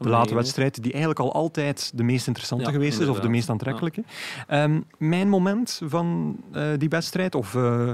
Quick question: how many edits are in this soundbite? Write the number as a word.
one